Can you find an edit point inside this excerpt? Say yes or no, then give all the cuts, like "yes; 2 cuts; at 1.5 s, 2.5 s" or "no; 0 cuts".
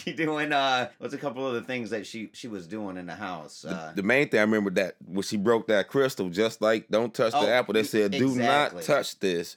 yes; 1 cut; at 0.9 s